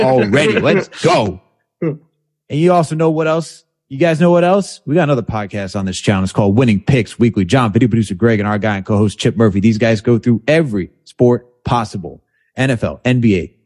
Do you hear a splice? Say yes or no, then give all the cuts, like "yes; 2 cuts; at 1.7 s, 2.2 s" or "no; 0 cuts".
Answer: no; 0 cuts